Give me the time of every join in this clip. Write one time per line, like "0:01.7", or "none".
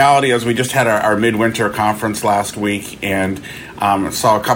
none

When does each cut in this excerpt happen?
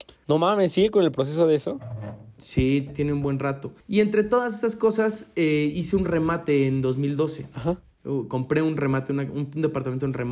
0:02.9
0:03.8

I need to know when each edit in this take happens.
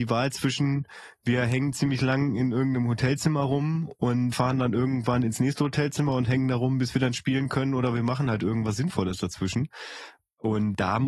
0:04.3

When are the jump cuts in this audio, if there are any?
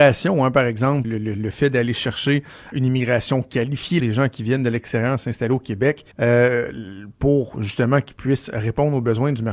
0:01.0
0:02.7
0:04.0
0:06.1

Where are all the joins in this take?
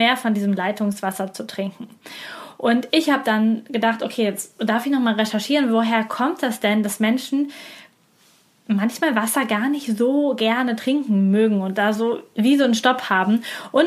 none

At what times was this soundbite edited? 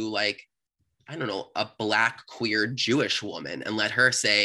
none

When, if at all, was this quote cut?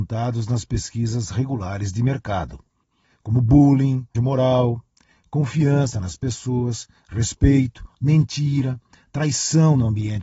0:04.1

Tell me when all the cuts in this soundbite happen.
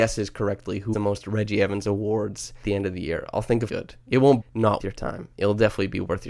0:00.9
0:02.6
0:03.7
0:04.4
0:04.8

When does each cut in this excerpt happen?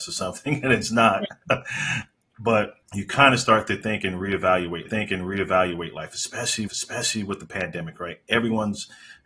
0:02.8
0:04.9
0:06.7

